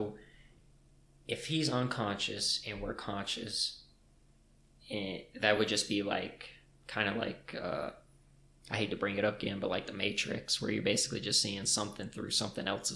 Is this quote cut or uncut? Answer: uncut